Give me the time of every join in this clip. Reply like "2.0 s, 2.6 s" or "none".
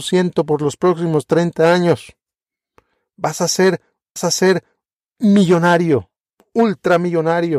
4.2 s